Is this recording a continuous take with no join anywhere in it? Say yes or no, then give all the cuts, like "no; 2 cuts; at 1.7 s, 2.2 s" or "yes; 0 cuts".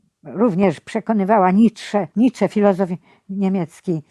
no; 1 cut; at 2.1 s